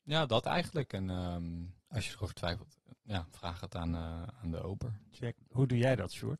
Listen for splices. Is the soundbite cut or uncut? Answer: cut